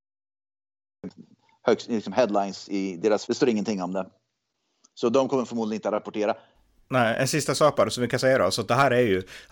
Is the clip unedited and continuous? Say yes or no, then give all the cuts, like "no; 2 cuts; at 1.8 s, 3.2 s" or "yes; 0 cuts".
no; 1 cut; at 3.3 s